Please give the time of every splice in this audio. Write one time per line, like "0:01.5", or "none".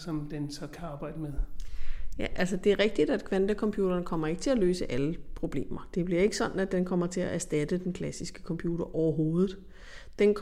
none